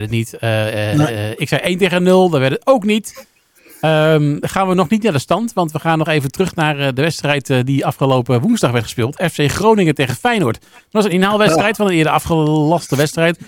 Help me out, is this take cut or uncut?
uncut